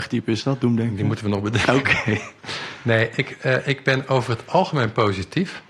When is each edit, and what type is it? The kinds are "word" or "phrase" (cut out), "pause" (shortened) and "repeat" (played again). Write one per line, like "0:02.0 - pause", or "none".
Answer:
none